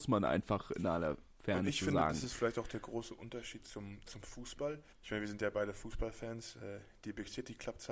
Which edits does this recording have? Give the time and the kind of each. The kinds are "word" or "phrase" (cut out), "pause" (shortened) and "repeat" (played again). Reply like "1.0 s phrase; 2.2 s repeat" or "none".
4.9 s pause